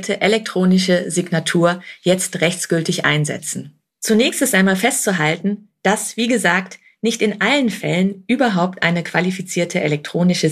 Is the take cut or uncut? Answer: cut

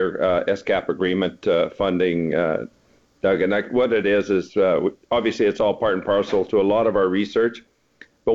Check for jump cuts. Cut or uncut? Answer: uncut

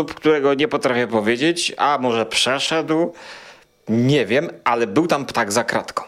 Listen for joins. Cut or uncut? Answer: uncut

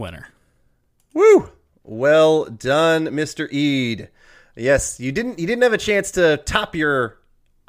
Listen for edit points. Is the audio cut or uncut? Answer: uncut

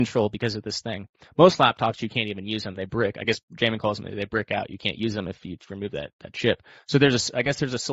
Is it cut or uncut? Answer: uncut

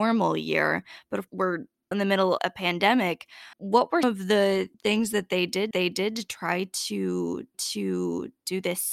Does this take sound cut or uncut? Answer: cut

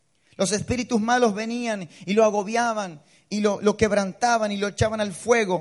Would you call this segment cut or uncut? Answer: uncut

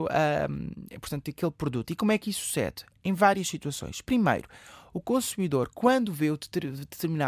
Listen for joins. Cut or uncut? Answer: uncut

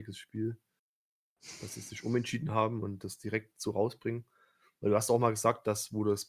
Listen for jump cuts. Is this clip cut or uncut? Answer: uncut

